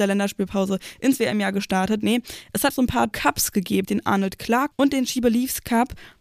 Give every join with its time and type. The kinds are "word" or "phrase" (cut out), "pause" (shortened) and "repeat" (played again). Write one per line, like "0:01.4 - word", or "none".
0:02.7 - phrase
0:03.1 - phrase
0:03.8 - word
0:04.7 - word

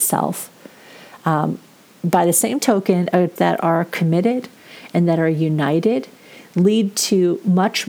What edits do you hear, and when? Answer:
0:03.4 - word

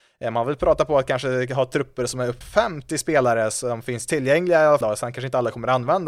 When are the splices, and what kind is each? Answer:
0:02.4 - word
0:04.8 - word

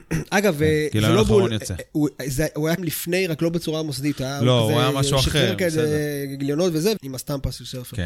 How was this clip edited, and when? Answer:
0:02.8 - word
0:07.0 - phrase

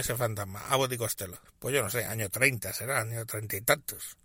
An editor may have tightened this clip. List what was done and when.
0:01.5 - pause

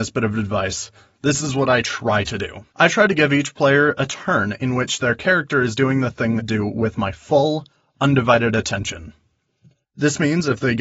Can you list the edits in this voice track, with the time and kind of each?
0:02.7 - pause
0:06.4 - phrase

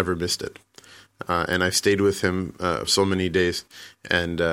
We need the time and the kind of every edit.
0:02.9 - word

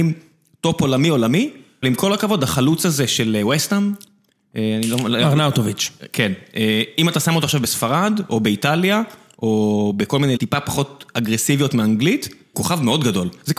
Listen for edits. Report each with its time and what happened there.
0:01.8 - word
0:10.4 - word
0:12.5 - word

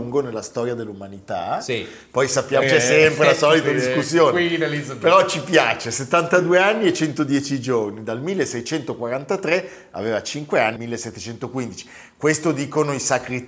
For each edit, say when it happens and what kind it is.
0:02.6 - word
0:10.8 - phrase

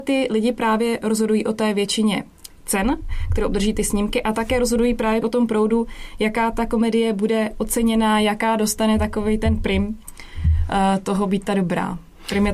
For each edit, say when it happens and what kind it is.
0:05.2 - word

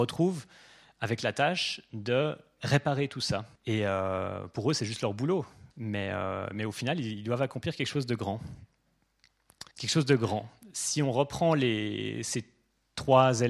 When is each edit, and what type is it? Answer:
0:03.6 - pause
0:09.7 - pause

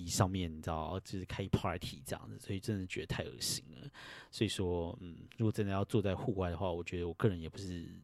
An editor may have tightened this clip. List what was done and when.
none

